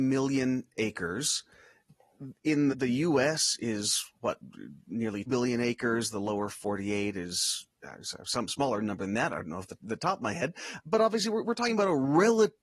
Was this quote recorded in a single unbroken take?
no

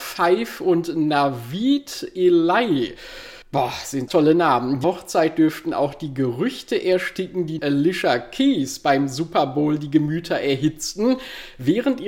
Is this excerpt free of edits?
no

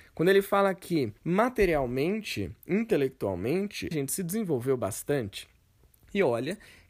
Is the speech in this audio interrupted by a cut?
yes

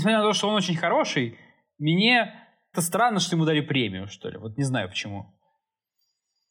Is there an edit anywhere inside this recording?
yes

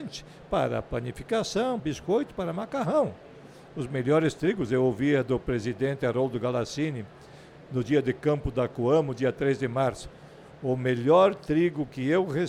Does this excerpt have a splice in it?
yes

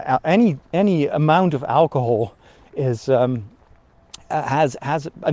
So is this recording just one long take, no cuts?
yes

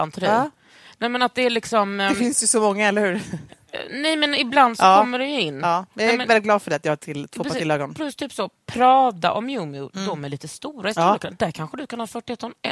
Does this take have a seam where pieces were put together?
no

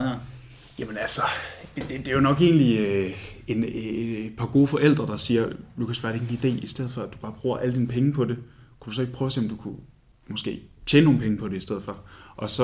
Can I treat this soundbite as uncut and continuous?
yes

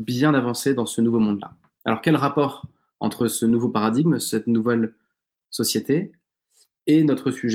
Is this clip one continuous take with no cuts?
yes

